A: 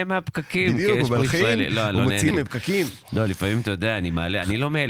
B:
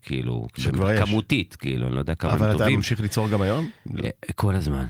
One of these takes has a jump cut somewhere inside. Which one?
A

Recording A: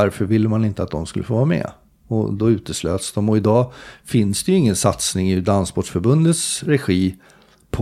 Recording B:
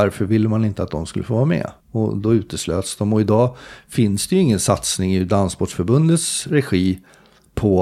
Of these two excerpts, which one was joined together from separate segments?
B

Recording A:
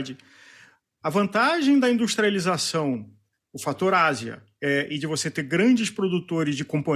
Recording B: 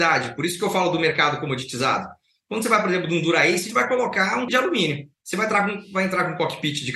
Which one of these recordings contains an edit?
B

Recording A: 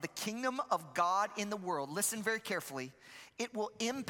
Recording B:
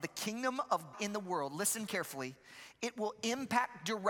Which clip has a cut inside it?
B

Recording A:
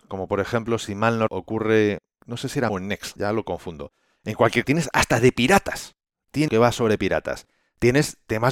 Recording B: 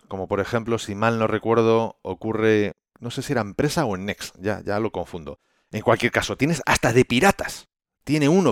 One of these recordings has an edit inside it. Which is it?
A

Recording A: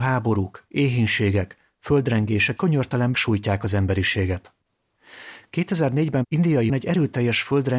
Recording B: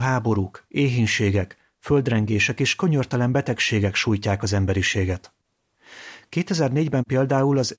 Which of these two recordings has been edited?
A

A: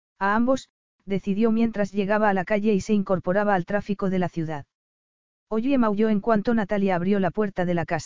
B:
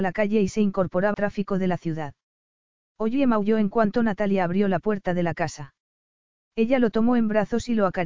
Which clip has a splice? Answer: B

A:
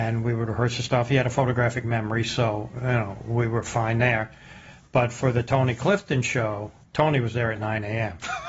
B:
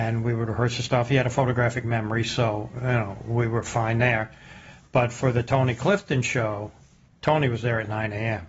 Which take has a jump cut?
A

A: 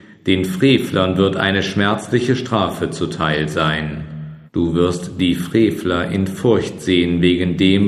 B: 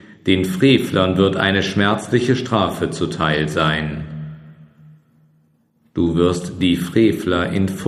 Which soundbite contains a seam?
A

